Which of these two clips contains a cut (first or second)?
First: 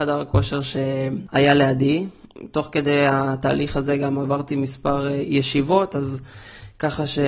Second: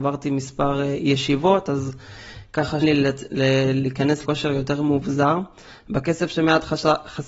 second